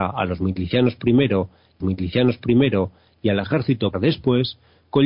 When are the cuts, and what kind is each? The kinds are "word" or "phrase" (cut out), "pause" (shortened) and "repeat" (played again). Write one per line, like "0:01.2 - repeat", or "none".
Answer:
0:01.8 - repeat
0:03.9 - word